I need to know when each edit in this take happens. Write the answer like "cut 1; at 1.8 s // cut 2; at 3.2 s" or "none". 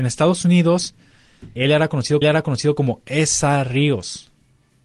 cut 1; at 1.6 s // cut 2; at 2.2 s